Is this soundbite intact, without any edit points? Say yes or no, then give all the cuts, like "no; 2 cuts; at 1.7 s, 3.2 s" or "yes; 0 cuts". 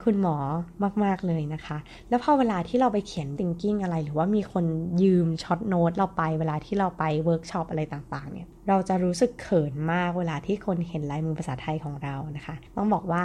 no; 1 cut; at 3.4 s